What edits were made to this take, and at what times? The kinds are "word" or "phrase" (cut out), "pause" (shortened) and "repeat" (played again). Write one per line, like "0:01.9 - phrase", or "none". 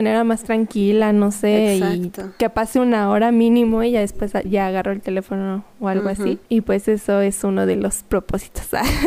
0:06.5 - pause